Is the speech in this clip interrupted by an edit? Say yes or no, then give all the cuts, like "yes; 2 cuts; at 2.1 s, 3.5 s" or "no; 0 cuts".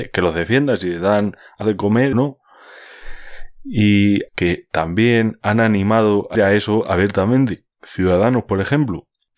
yes; 5 cuts; at 1.6 s, 2.1 s, 4.3 s, 6.3 s, 7.7 s